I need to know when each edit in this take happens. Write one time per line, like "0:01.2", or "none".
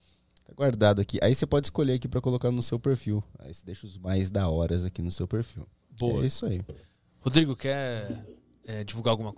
none